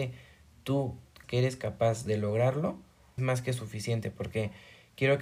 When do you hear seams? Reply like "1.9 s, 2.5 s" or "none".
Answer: 1.2 s, 3.2 s